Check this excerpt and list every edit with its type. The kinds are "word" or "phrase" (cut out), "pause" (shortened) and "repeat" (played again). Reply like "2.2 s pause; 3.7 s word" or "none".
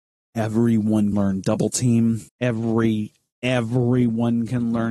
1.1 s word; 2.3 s pause